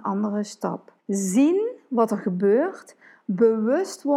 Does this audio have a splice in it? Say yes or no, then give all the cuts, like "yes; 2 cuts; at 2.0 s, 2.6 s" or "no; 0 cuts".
yes; 1 cut; at 1.0 s